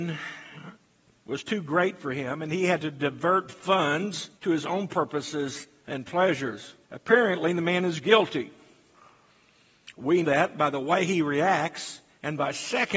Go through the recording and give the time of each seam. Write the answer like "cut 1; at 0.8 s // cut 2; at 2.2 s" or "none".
cut 1; at 2.8 s // cut 2; at 4.4 s // cut 3; at 6.8 s // cut 4; at 10.2 s